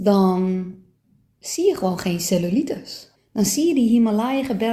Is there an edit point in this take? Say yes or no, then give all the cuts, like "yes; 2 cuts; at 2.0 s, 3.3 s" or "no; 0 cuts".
yes; 1 cut; at 3.2 s